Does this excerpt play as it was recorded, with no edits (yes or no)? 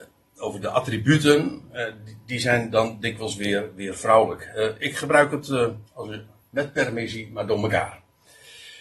no